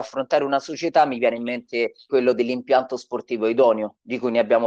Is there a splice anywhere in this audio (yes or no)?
yes